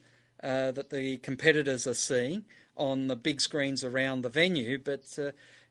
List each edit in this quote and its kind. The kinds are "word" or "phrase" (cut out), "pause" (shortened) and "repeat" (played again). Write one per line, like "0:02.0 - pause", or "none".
none